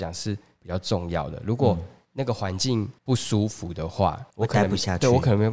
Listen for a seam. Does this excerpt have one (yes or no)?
yes